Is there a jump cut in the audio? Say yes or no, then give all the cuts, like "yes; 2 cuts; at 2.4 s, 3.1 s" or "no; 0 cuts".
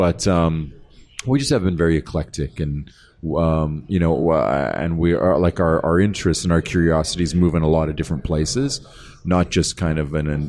no; 0 cuts